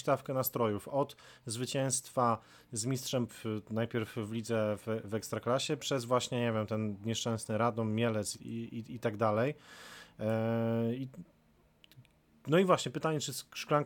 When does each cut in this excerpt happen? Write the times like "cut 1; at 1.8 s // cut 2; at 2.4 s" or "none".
cut 1; at 3.3 s // cut 2; at 8.3 s